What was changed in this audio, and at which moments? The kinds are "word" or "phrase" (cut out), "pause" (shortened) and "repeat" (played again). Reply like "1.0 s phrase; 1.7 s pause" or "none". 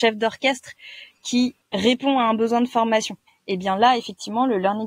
3.3 s pause